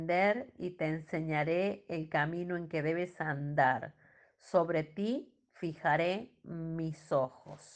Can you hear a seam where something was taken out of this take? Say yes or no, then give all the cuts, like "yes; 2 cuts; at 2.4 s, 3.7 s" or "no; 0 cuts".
no; 0 cuts